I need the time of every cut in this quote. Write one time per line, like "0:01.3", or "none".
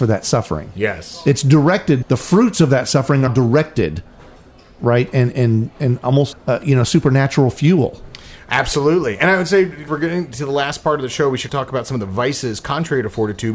0:02.0
0:03.3
0:05.3
0:06.3
0:09.9
0:11.5